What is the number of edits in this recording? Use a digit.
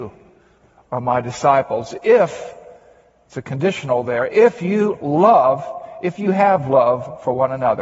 0